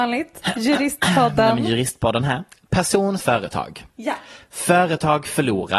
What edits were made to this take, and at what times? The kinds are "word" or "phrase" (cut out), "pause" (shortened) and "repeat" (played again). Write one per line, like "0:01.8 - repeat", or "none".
0:03.2 - word